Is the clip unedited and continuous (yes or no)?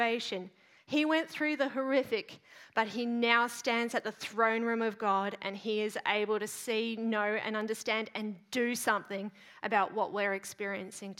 yes